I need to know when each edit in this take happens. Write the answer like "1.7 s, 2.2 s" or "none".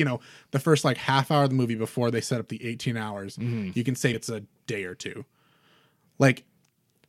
4.1 s